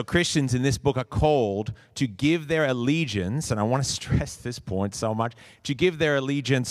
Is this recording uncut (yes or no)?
yes